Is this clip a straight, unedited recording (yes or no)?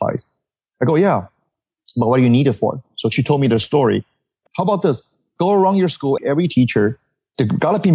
no